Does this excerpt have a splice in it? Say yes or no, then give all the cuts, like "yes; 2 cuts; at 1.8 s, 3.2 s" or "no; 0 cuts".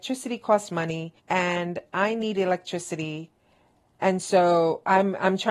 yes; 1 cut; at 1.2 s